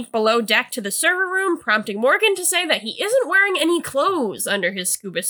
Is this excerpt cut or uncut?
uncut